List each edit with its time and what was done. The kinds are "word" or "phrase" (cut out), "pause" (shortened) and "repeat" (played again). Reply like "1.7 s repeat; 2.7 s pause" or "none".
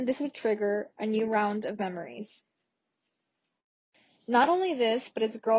none